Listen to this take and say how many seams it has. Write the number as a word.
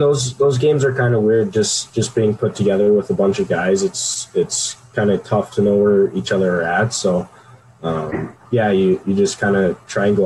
zero